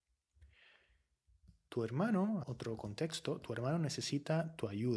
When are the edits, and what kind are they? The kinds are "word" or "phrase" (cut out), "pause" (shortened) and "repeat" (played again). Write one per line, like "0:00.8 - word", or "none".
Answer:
0:02.4 - word